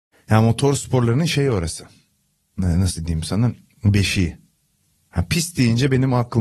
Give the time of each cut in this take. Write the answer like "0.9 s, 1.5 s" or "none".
none

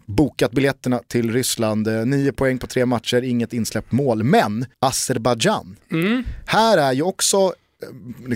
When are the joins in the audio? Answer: 4.7 s

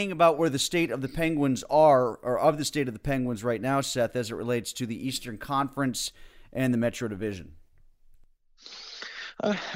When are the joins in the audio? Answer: none

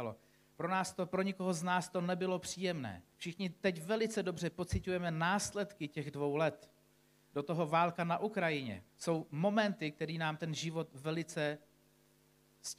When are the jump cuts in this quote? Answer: 3.1 s, 8.9 s

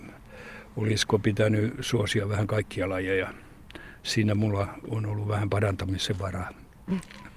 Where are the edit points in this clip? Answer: none

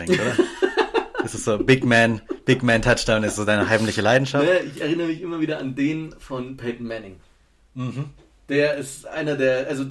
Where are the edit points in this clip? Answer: none

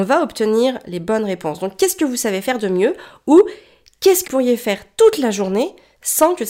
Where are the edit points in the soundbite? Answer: 4.3 s

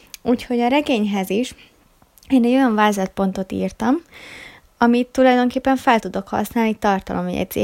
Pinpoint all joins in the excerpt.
none

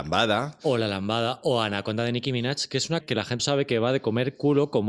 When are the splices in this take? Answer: 3.0 s, 3.4 s

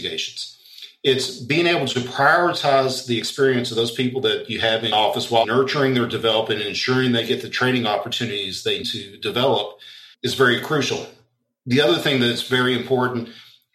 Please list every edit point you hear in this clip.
4.9 s, 5.4 s, 8.8 s, 10.1 s

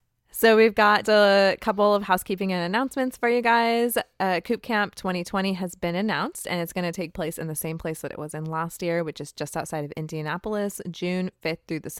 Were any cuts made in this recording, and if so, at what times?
1.0 s

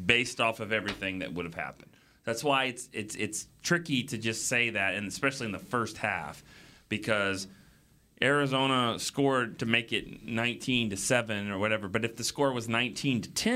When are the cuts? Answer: none

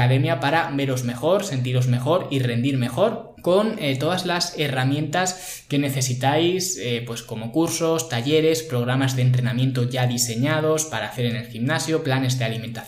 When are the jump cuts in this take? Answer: none

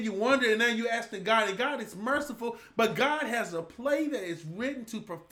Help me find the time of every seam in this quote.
none

